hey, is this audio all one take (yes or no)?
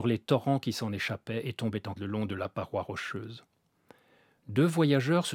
no